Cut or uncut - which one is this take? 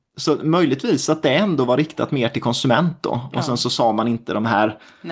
uncut